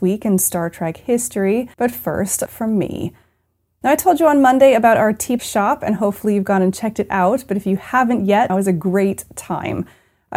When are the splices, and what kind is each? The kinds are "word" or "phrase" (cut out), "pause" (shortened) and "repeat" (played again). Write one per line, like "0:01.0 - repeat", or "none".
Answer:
0:01.7 - pause
0:02.5 - word
0:05.4 - word
0:08.5 - word